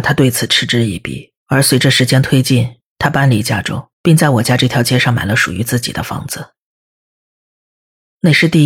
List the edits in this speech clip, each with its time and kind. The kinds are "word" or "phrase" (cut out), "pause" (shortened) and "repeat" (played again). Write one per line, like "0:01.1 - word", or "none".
0:01.4 - pause
0:03.9 - pause